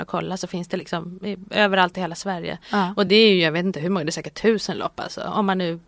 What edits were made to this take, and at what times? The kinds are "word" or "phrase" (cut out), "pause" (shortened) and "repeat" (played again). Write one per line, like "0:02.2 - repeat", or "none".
none